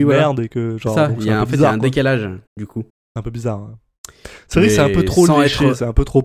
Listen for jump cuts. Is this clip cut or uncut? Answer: cut